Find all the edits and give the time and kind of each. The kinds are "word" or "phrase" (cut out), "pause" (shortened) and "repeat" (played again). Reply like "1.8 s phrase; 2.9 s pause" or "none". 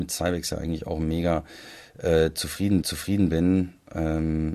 2.8 s repeat